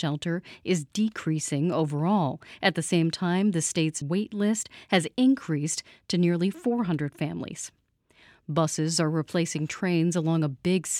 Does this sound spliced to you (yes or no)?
yes